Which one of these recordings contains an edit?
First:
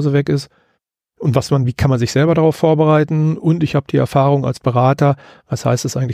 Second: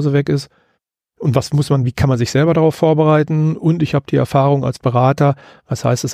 first; 1 cut; at 1.5 s

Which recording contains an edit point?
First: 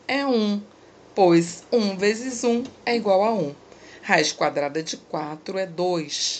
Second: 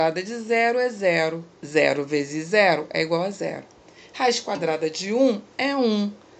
second; 1 cut; at 1.6 s

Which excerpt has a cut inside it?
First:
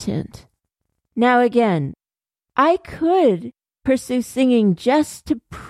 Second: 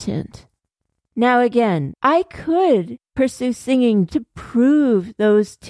second; 3 cuts; at 2.0 s, 3.0 s, 4.1 s

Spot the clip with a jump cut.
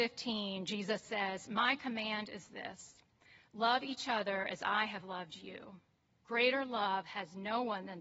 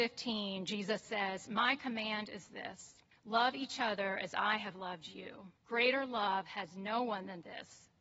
second; 2 cuts; at 3.1 s, 5.6 s

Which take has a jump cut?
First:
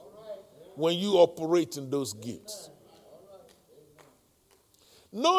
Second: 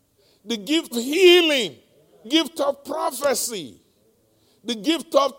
second; 2 cuts; at 0.9 s, 2.2 s

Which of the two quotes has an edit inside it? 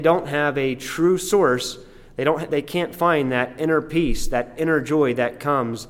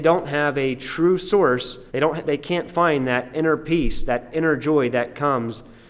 second; 1 cut; at 1.9 s

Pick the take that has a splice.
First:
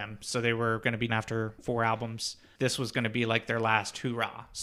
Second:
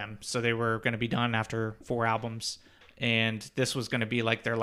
first; 2 cuts; at 1.1 s, 2.6 s

